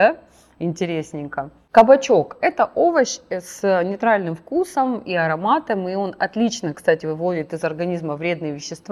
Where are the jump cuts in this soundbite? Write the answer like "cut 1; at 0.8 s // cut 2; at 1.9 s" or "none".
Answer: none